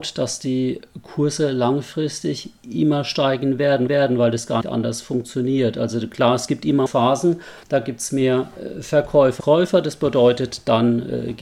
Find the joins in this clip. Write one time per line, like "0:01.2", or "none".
0:03.9
0:04.6
0:06.9
0:07.6
0:09.4